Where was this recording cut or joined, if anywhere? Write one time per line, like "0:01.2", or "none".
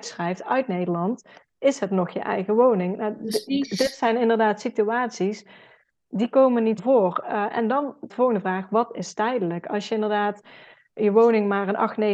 0:06.8
0:08.1